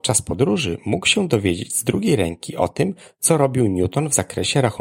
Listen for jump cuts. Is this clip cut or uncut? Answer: uncut